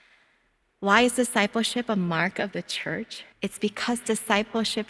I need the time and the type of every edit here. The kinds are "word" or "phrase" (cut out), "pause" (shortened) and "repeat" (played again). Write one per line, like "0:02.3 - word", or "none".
0:03.3 - pause